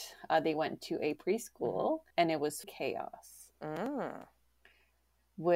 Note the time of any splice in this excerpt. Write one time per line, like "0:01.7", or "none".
0:01.2
0:02.1
0:02.6

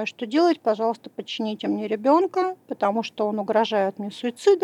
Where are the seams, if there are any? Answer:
none

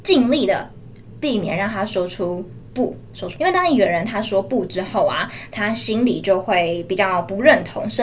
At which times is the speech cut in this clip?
0:03.4

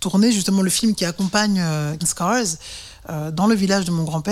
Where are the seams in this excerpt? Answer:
0:02.0

